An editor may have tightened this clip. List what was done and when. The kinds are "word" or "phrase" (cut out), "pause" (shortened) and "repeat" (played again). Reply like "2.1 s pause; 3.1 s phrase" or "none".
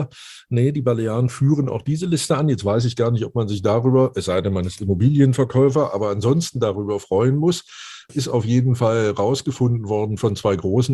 8.1 s word